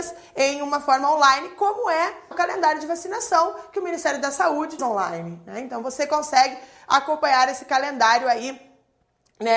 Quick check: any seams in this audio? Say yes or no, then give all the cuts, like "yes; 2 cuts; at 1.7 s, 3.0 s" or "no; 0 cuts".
yes; 2 cuts; at 2.3 s, 4.8 s